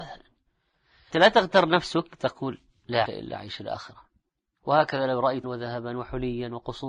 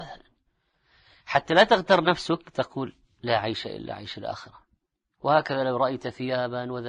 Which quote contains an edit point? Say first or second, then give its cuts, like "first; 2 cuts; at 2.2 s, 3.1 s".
first; 3 cuts; at 1.1 s, 3.1 s, 5.4 s